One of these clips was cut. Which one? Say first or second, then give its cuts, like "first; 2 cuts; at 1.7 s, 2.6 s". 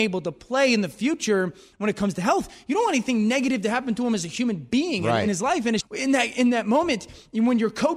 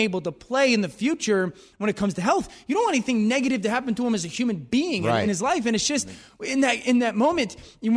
first; 1 cut; at 5.8 s